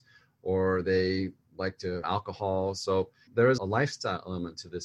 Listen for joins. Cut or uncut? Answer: cut